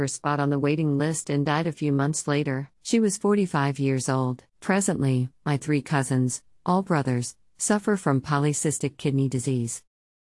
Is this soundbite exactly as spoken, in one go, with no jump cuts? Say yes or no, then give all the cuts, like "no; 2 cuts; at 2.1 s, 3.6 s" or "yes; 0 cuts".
no; 2 cuts; at 2.7 s, 4.5 s